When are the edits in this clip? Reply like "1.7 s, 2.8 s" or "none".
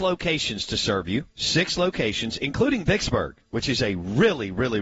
1.3 s, 3.5 s